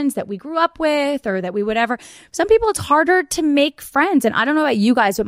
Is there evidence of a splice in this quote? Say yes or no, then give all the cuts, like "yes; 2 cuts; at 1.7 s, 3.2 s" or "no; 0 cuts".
no; 0 cuts